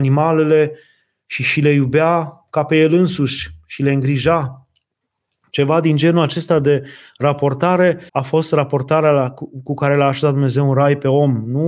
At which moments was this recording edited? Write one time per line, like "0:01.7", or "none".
0:08.1